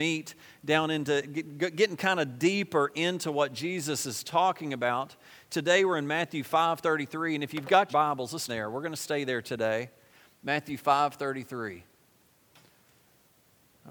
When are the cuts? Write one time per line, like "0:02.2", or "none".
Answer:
0:07.9
0:08.5